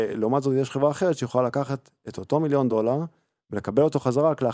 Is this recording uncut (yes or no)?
yes